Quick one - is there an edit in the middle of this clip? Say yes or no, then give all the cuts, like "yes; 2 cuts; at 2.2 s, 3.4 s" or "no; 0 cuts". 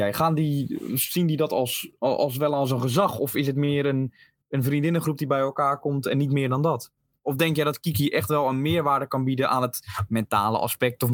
no; 0 cuts